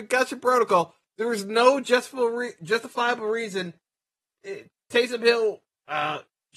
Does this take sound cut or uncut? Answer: uncut